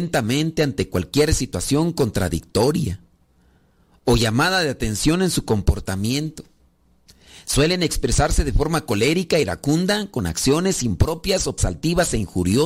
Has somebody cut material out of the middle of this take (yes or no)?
yes